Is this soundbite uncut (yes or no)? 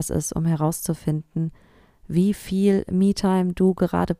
yes